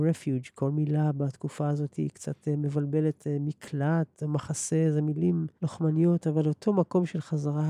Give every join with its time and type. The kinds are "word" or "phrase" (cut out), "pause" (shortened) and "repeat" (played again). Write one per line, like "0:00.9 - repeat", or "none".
0:05.6 - pause